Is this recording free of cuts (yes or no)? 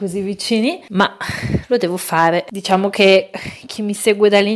yes